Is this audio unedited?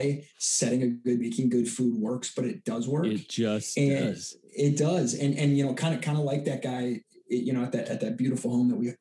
no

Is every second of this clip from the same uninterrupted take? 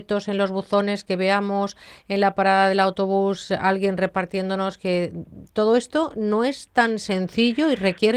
yes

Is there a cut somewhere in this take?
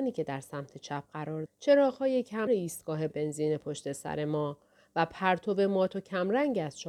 yes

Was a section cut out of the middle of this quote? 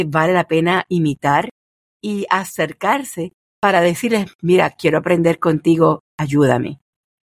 no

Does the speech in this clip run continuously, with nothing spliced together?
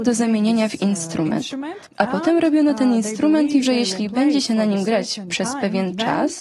no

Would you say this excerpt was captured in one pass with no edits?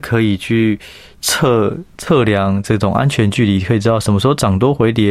yes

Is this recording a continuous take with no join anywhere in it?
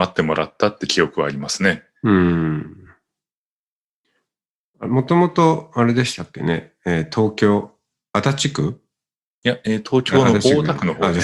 yes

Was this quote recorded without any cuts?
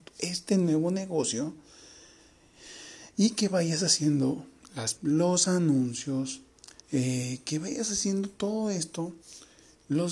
no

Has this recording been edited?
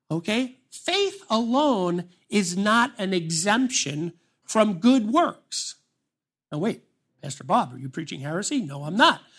no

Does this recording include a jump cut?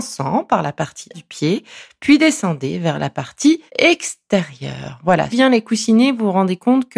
yes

